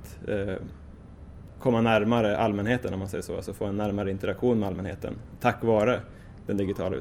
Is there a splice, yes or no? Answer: no